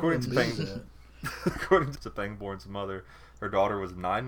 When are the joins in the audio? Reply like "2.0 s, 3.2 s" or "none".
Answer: 1.9 s